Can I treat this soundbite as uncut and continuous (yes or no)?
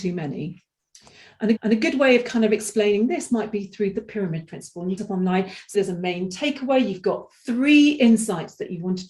no